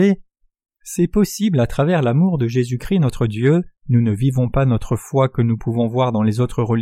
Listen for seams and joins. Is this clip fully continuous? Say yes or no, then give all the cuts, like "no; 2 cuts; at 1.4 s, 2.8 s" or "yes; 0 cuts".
no; 1 cut; at 3.8 s